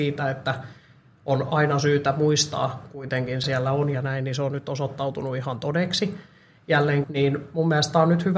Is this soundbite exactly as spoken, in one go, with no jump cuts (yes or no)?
no